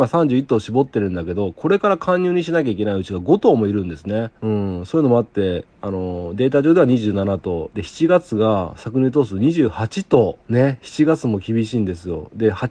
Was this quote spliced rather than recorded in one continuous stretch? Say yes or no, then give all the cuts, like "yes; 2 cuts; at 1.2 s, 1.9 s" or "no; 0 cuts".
yes; 3 cuts; at 4.4 s, 5.7 s, 10.4 s